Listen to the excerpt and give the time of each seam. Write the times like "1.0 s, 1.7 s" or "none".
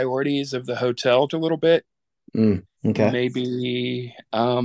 1.3 s